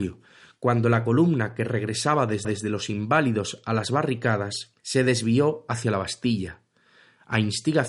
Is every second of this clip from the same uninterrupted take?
no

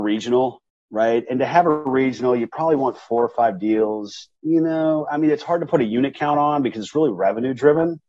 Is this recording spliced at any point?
no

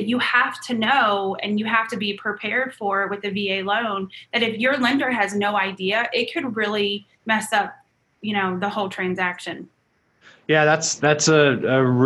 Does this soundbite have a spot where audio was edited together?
yes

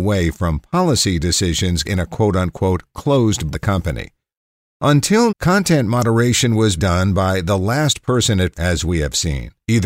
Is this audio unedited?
no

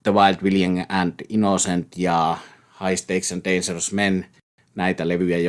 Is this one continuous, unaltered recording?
yes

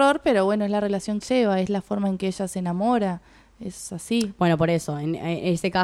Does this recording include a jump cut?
yes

